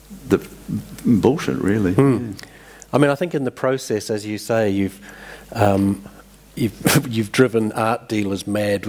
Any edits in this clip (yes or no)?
no